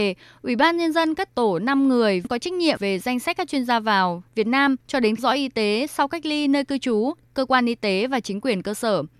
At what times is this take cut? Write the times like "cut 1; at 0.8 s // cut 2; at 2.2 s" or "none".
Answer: cut 1; at 1.3 s // cut 2; at 4.8 s // cut 3; at 5.2 s